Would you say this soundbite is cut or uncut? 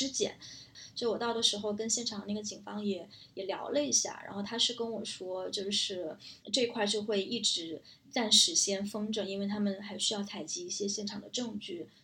cut